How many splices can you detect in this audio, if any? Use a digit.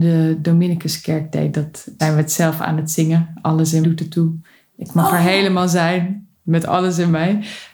2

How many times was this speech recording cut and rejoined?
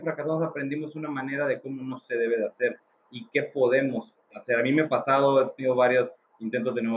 1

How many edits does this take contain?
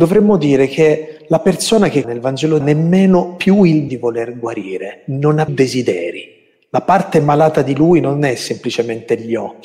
4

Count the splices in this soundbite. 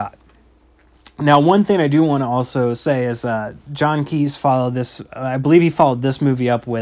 0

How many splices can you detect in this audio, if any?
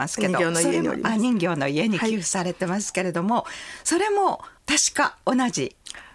1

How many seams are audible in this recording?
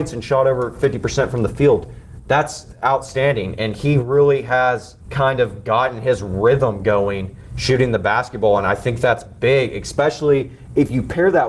1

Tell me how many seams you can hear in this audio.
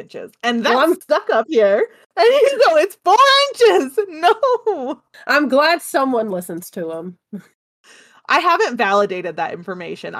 0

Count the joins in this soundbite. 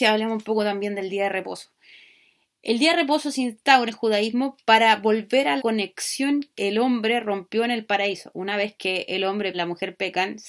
4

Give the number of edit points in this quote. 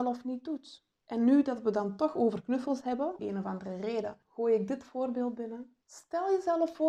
4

